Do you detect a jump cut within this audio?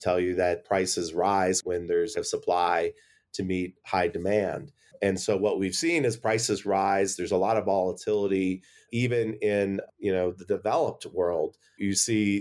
yes; 1 cut; at 2.1 s

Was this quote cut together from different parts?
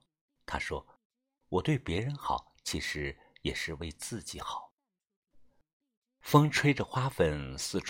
no; 0 cuts

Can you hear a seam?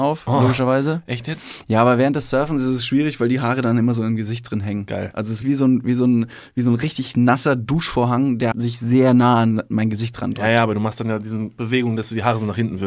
yes; 2 cuts; at 5.4 s, 8.5 s

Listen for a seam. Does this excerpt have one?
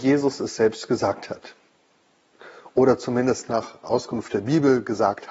no; 0 cuts

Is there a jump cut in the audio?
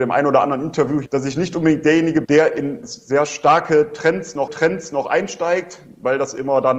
yes; 4 cuts; at 1.0 s, 2.2 s, 2.8 s, 4.5 s

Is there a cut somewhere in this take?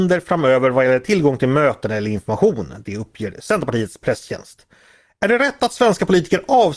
no; 0 cuts

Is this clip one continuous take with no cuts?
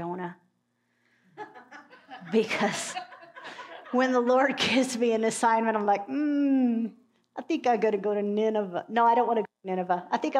yes; 0 cuts

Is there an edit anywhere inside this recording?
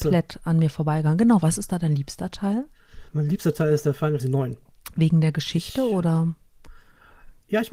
yes; 2 cuts; at 3.1 s, 4.2 s

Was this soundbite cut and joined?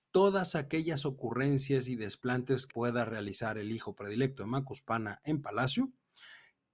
yes; 1 cut; at 2.7 s

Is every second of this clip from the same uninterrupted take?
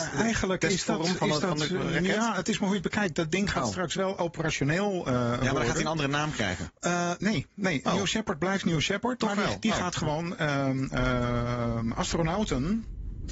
yes; 0 cuts

